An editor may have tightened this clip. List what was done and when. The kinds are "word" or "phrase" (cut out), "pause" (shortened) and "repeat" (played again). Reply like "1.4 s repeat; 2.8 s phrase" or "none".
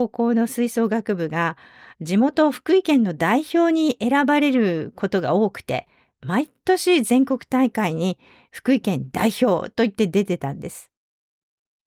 none